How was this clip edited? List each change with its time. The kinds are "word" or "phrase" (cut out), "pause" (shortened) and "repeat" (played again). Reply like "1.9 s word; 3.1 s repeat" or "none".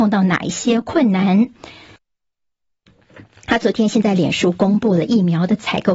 none